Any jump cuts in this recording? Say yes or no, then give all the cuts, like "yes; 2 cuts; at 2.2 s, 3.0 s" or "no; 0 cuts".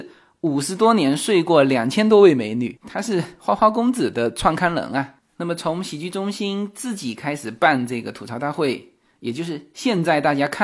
no; 0 cuts